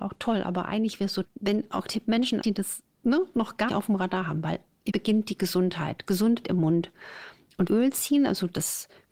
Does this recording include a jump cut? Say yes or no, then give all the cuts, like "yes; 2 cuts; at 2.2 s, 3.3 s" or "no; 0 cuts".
yes; 7 cuts; at 1.2 s, 1.9 s, 2.4 s, 3.7 s, 4.9 s, 6.4 s, 7.7 s